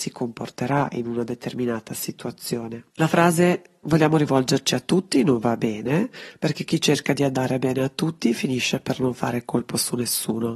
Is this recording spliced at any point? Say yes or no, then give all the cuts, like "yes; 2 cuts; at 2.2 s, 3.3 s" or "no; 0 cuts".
yes; 1 cut; at 2.9 s